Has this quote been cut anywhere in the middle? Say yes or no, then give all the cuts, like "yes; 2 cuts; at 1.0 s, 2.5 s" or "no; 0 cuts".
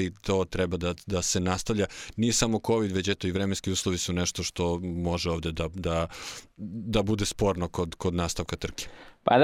no; 0 cuts